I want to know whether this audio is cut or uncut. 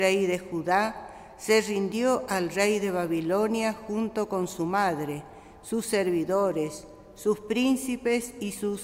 uncut